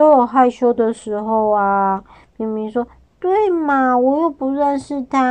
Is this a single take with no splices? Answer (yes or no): no